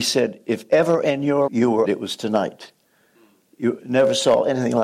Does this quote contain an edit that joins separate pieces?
yes; 2 cuts; at 1.5 s, 1.8 s

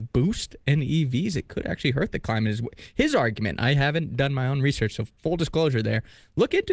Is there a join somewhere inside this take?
no; 0 cuts

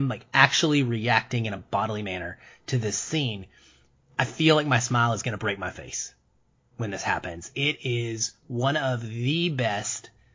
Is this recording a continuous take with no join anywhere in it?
yes; 0 cuts

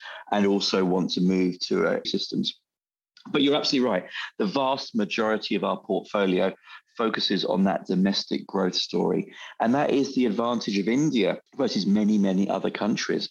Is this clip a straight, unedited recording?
no; 2 cuts; at 2.0 s, 11.5 s

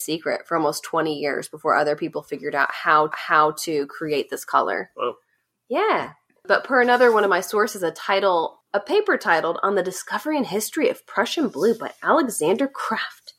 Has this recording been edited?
yes; 2 cuts; at 3.1 s, 8.6 s

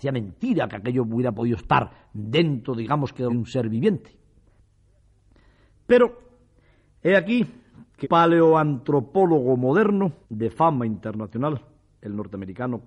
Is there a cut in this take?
yes; 3 cuts; at 3.3 s, 8.0 s, 10.2 s

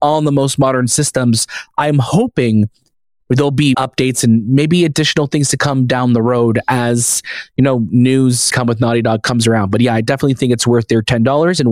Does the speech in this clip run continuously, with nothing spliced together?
no; 2 cuts; at 3.7 s, 8.5 s

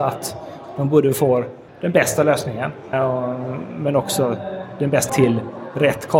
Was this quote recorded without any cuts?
no; 3 cuts; at 1.7 s, 2.9 s, 5.1 s

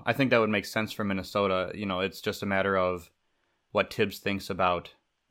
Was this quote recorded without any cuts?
yes; 0 cuts

